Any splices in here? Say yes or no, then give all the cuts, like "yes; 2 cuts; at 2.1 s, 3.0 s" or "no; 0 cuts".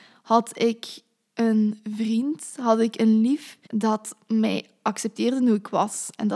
yes; 1 cut; at 3.7 s